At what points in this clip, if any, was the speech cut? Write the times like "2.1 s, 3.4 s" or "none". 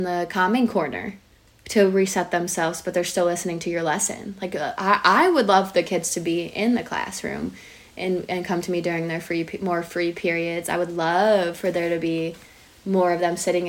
1.4 s

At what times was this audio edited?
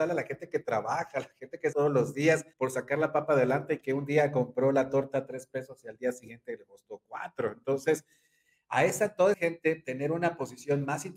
1.7 s, 2.5 s, 9.3 s

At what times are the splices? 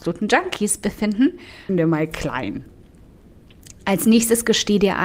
1.7 s

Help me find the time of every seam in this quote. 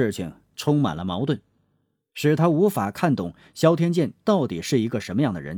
none

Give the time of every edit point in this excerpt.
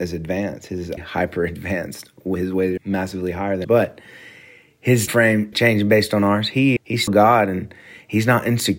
1.0 s, 2.8 s, 3.6 s, 5.1 s, 5.5 s, 6.8 s, 7.1 s

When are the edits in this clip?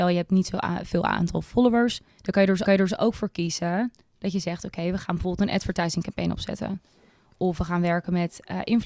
2.1 s, 2.7 s

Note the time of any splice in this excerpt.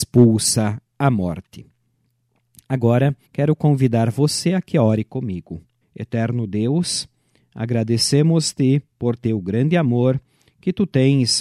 3.3 s, 5.8 s

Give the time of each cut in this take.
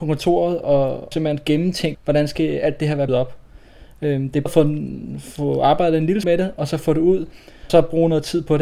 1.1 s, 1.9 s, 3.1 s, 4.5 s, 6.2 s, 7.7 s

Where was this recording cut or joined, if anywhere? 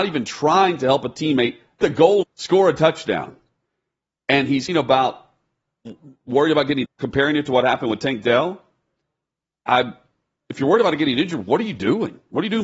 1.8 s, 2.2 s, 4.7 s, 6.8 s

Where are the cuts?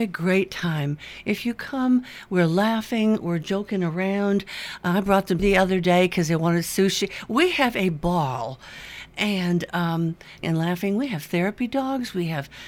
5.4 s, 10.4 s

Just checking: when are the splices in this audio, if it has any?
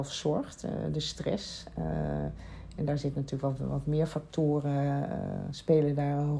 none

